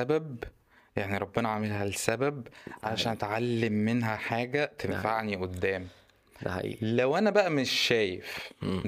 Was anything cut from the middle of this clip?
no; 0 cuts

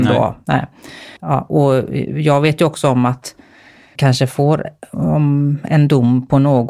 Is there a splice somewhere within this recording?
yes; 2 cuts; at 1.2 s, 4.0 s

